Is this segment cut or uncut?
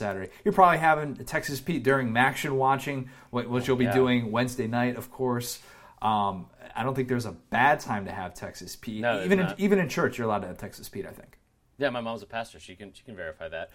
uncut